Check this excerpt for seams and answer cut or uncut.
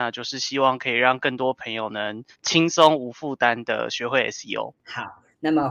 cut